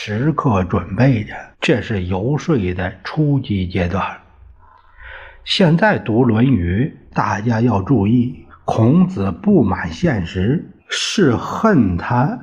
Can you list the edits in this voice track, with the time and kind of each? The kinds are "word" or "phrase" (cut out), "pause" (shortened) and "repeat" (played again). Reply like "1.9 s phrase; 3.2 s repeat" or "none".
1.5 s pause; 8.5 s pause; 10.8 s pause